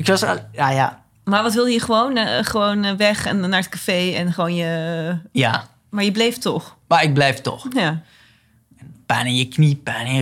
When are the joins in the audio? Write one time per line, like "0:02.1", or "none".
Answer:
none